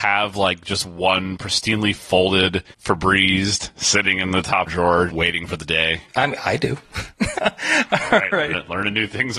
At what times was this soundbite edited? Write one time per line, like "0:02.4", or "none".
0:02.7
0:04.7
0:05.1
0:06.1
0:07.4